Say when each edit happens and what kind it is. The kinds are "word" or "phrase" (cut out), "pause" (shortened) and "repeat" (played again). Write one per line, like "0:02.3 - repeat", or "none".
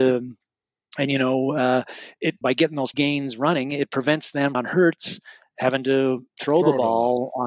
0:02.4 - word
0:02.9 - phrase
0:04.5 - phrase